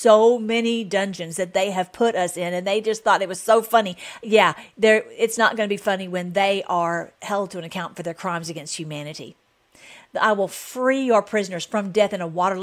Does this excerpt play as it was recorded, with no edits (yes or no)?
yes